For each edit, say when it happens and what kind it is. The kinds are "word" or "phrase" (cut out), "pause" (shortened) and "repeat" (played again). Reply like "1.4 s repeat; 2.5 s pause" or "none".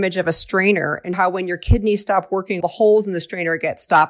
1.1 s word; 2.6 s word